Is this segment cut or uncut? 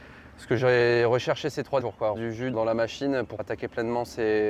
cut